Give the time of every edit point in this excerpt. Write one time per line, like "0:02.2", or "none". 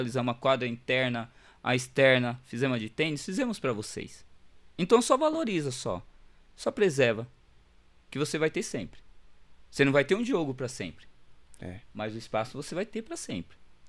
none